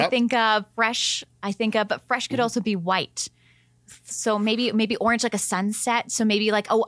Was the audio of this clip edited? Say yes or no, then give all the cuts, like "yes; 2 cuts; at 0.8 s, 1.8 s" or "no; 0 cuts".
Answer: no; 0 cuts